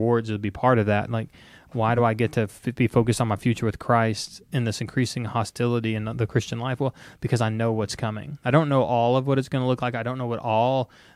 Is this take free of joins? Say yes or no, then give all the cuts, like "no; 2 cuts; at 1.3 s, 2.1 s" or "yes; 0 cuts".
yes; 0 cuts